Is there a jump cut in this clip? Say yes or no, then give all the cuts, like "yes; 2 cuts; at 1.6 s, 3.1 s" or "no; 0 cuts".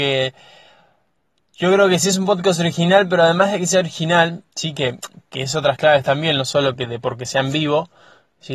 no; 0 cuts